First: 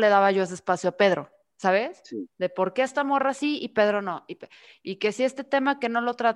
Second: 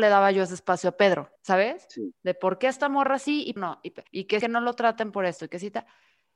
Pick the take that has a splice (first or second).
second